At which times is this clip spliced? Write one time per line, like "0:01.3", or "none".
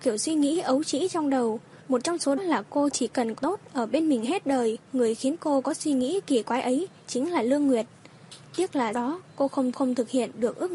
0:01.8
0:02.4
0:03.4
0:04.9
0:08.9
0:09.7